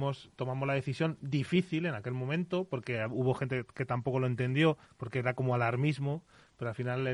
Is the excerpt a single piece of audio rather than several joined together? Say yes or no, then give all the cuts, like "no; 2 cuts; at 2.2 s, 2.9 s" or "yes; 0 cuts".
no; 1 cut; at 4.8 s